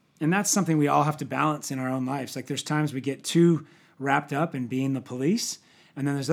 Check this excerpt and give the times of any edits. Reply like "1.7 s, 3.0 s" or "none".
none